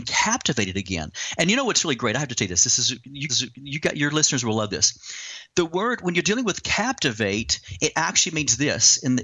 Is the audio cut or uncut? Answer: cut